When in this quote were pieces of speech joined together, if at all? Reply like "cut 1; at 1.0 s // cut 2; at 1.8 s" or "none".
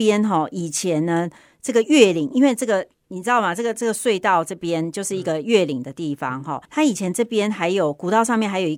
cut 1; at 6.6 s